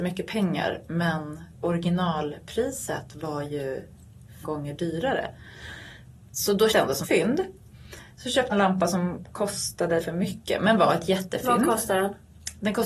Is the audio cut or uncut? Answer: cut